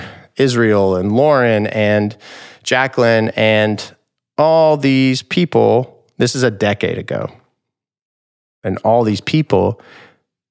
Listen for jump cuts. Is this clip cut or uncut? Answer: uncut